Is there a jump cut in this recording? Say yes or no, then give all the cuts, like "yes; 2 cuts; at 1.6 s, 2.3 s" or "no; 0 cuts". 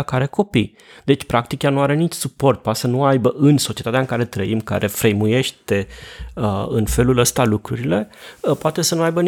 no; 0 cuts